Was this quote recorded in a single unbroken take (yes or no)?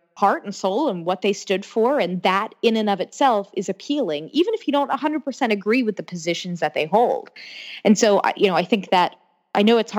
yes